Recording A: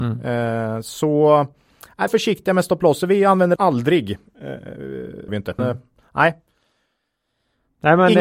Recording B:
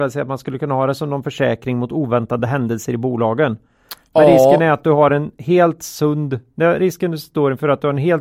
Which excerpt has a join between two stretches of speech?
A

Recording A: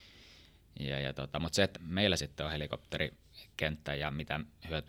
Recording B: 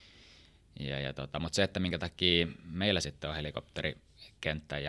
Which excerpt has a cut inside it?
A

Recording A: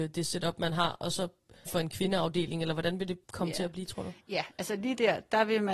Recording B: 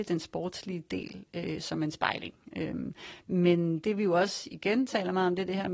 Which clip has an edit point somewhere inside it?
A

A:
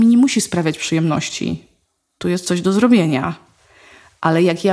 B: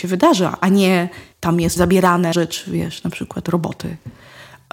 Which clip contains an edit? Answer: B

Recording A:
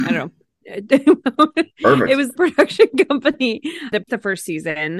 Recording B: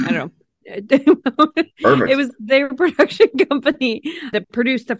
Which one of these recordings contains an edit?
A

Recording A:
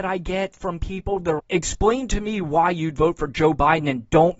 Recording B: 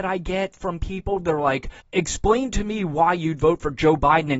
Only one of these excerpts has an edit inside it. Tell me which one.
A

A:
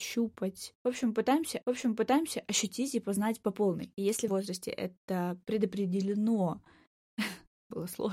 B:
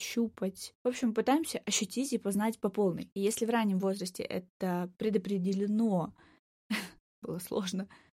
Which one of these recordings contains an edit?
A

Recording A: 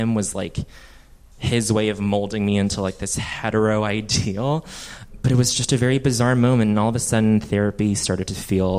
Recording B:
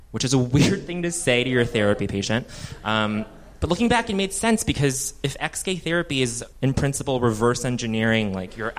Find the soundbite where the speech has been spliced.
B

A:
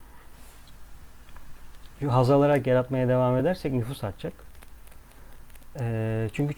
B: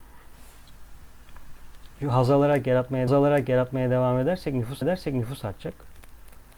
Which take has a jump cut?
B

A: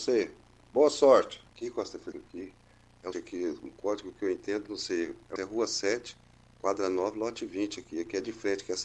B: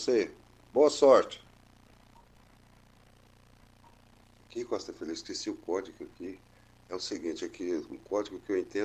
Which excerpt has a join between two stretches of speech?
A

